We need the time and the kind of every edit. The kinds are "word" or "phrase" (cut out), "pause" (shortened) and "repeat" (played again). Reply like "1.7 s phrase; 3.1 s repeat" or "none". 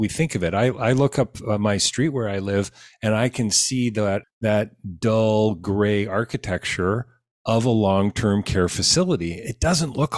4.2 s word